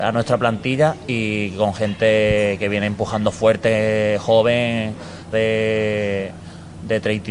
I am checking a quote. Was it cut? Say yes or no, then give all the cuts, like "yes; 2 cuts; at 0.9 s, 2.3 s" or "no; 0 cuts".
yes; 1 cut; at 5.3 s